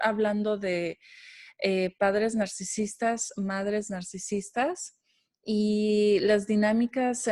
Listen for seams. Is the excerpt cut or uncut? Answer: uncut